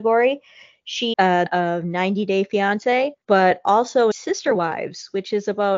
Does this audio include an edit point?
yes; 4 cuts; at 1.1 s, 1.5 s, 3.2 s, 4.1 s

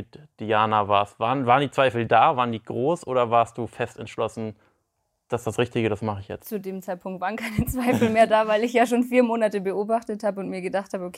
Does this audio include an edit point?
no; 0 cuts

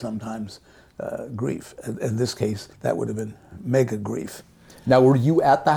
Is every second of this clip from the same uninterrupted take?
no; 1 cut; at 2.7 s

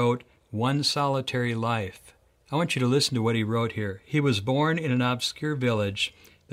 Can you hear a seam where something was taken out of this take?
no; 0 cuts

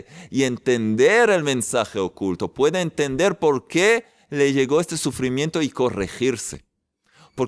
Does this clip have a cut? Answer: no; 0 cuts

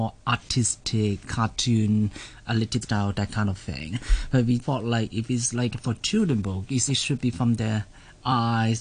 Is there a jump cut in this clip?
yes; 4 cuts; at 1.2 s, 2.8 s, 4.6 s, 6.9 s

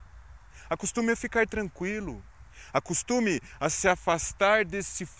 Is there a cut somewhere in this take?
no; 0 cuts

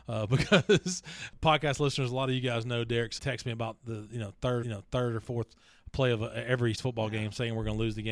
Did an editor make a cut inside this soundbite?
yes; 3 cuts; at 3.2 s, 4.6 s, 6.7 s

